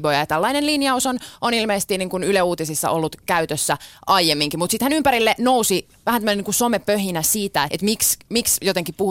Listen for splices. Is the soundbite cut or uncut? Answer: cut